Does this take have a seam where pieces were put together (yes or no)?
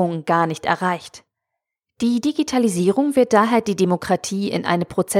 no